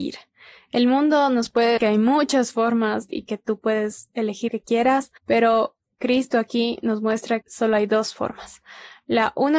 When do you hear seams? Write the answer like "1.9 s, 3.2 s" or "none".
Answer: 1.8 s, 3.1 s, 4.5 s, 5.2 s, 7.4 s